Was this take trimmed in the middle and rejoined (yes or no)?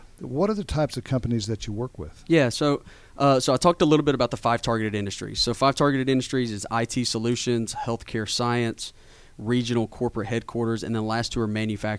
no